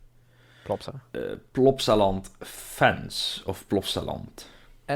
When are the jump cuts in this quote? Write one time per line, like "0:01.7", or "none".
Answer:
none